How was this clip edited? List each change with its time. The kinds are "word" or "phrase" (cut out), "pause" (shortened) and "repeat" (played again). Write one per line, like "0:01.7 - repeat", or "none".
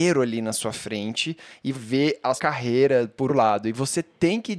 0:01.7 - word
0:02.4 - word
0:03.3 - word

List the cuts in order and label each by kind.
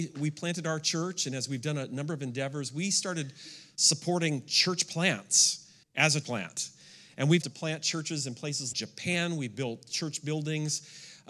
0:05.8 - pause
0:06.2 - word
0:07.4 - word
0:08.7 - word

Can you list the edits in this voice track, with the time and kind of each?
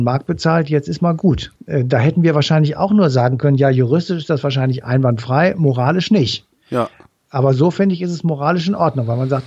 0:01.6 - pause

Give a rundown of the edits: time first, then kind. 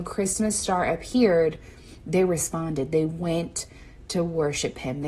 none

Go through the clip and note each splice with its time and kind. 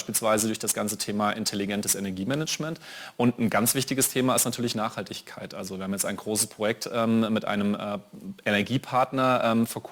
none

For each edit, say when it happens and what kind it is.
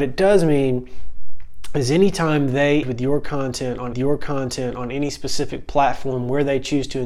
0:02.8 - word
0:03.9 - repeat

